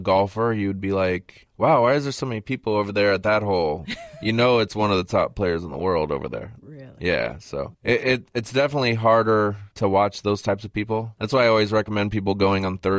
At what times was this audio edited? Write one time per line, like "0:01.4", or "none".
none